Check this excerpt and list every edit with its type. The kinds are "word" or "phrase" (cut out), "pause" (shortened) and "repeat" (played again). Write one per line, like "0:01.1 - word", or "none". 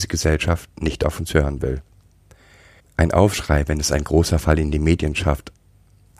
none